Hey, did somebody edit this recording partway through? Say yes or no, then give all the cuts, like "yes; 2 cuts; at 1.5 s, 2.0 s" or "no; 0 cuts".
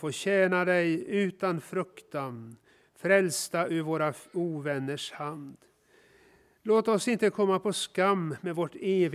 no; 0 cuts